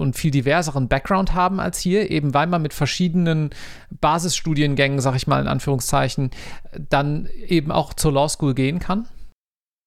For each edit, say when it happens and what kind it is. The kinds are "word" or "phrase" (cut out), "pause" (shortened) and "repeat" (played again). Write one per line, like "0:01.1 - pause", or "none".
none